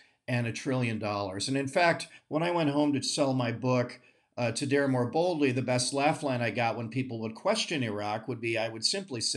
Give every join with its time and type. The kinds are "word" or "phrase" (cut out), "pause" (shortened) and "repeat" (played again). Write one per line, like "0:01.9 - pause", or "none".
none

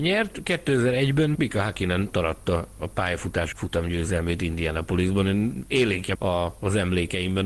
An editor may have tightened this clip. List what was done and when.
0:01.3 - word
0:02.1 - word
0:03.5 - word
0:06.1 - word

